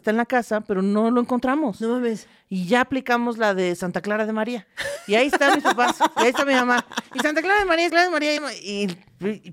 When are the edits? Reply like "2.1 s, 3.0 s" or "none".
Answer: 7.9 s, 8.4 s